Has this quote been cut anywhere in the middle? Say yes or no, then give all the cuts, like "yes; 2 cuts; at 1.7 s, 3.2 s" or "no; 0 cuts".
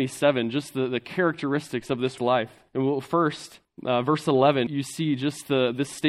yes; 4 cuts; at 2.2 s, 2.7 s, 3.6 s, 4.7 s